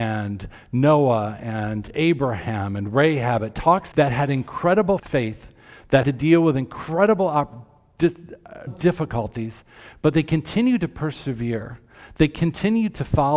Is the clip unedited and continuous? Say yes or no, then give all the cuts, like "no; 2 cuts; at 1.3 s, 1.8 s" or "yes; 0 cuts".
no; 4 cuts; at 3.9 s, 5.0 s, 6.0 s, 8.7 s